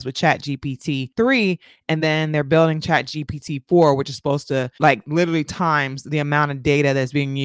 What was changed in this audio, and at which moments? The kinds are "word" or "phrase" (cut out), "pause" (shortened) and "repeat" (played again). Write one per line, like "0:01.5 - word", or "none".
none